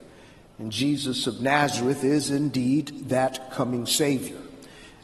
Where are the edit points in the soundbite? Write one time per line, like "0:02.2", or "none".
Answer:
none